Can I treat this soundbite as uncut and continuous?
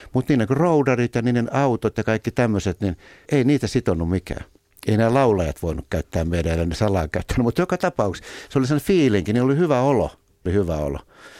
no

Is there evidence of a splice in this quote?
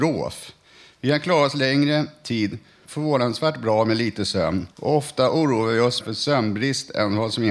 yes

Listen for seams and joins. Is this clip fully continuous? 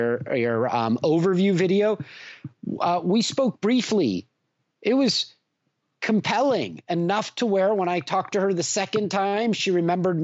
yes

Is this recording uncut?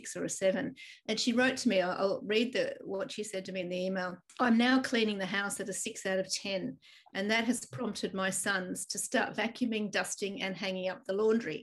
yes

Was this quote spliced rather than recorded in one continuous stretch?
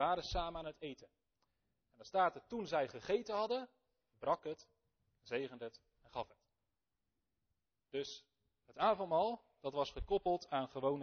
yes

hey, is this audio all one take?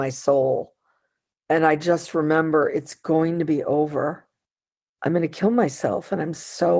yes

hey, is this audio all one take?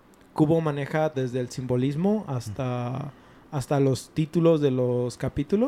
no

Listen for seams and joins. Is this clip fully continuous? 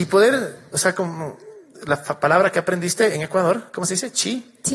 yes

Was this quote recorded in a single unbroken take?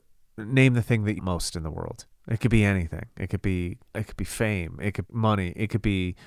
no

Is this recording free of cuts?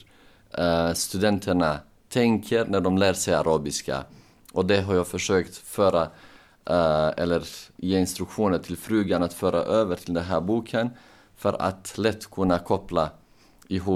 yes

